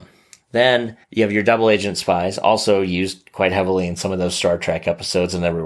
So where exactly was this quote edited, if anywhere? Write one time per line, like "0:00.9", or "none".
0:01.0